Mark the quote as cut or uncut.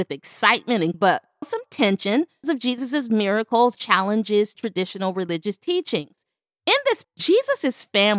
cut